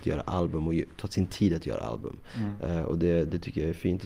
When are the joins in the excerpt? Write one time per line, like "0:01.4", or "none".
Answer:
none